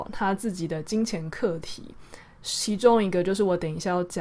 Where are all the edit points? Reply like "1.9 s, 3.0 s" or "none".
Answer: none

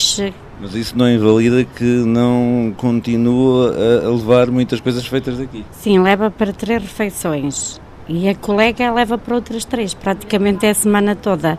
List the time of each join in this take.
none

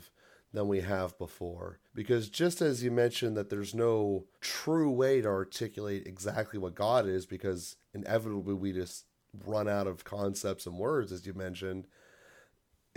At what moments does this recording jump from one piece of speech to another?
1.9 s, 4.3 s

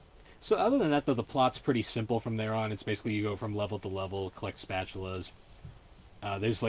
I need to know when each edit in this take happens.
none

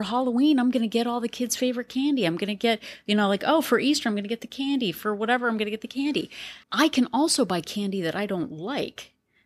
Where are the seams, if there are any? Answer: 6.6 s

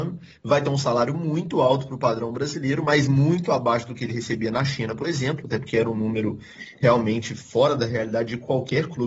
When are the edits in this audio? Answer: none

